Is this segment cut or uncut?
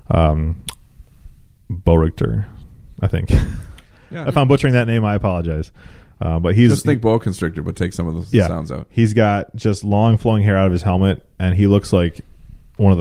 uncut